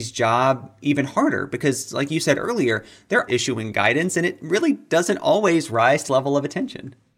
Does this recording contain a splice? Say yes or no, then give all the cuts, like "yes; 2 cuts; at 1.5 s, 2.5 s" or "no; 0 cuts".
yes; 2 cuts; at 3.3 s, 6.1 s